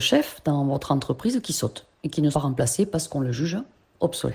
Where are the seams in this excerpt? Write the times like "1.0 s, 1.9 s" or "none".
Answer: 2.3 s